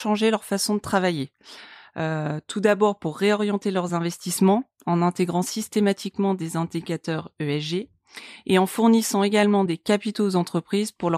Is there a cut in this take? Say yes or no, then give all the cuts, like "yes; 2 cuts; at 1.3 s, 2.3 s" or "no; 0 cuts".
no; 0 cuts